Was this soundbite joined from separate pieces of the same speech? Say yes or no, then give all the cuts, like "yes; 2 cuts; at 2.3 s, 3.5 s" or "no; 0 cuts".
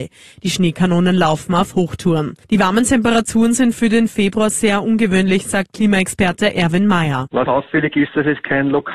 yes; 2 cuts; at 2.4 s, 7.5 s